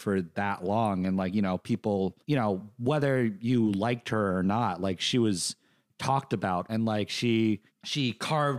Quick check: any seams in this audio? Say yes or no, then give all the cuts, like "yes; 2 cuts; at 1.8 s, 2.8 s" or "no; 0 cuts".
yes; 1 cut; at 6.7 s